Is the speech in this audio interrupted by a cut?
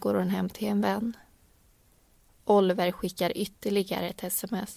no; 0 cuts

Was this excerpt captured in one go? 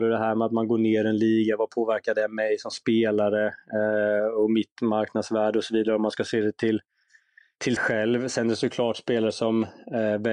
no; 1 cut; at 7.8 s

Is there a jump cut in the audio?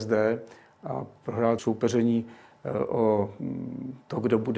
yes; 1 cut; at 1.6 s

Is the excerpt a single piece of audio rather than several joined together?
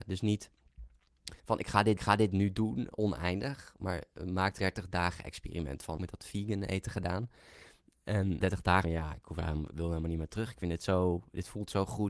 no; 7 cuts; at 1.4 s, 2.0 s, 4.6 s, 6.0 s, 8.4 s, 8.8 s, 9.7 s

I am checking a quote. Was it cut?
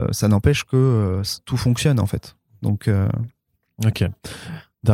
no; 0 cuts

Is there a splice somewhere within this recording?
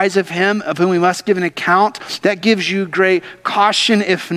no; 0 cuts

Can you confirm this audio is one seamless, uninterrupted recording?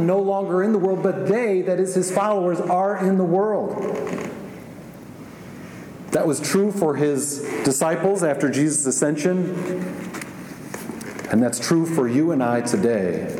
yes; 0 cuts

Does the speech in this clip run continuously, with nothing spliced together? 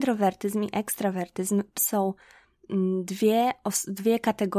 no; 1 cut; at 1.8 s

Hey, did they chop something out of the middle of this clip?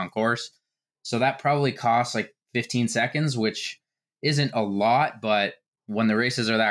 no; 0 cuts

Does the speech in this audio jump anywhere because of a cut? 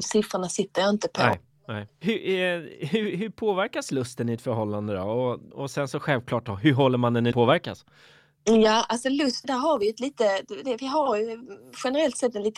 yes; 3 cuts; at 5.5 s, 7.3 s, 9.4 s

